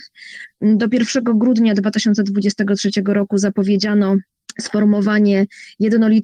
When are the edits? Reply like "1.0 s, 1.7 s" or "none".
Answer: none